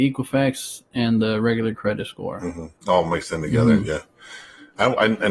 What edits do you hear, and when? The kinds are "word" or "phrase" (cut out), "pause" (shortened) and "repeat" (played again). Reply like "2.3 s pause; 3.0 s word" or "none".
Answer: 2.8 s pause